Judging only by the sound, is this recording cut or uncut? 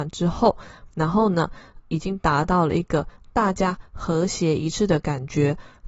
cut